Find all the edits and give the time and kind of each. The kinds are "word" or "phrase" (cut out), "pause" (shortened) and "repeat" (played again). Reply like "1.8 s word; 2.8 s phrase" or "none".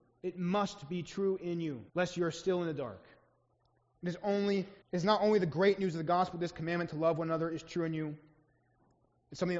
1.9 s pause; 3.5 s pause; 4.8 s pause